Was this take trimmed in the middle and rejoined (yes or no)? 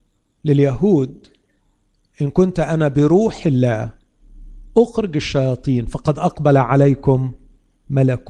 no